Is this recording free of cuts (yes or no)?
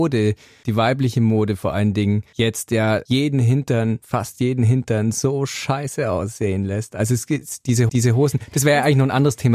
no